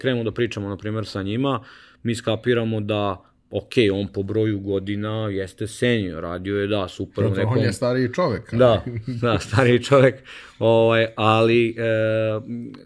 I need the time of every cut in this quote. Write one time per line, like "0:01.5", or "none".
none